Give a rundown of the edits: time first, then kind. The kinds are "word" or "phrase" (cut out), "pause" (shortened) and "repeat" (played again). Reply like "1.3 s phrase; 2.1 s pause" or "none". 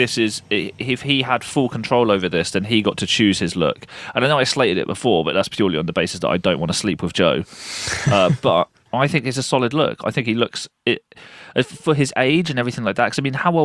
8.9 s pause